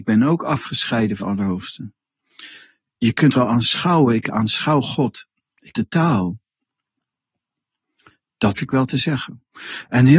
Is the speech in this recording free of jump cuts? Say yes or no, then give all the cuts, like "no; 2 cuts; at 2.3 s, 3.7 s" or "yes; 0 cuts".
no; 4 cuts; at 1.2 s, 3.3 s, 5.7 s, 8.6 s